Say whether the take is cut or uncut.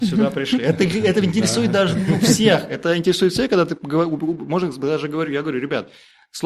uncut